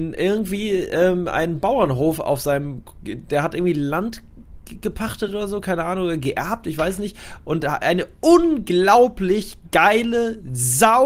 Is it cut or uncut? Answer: uncut